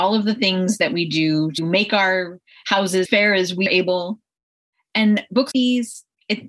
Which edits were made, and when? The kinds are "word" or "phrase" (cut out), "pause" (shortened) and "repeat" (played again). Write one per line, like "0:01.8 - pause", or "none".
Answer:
0:01.6 - word
0:03.0 - word
0:03.7 - word
0:05.5 - word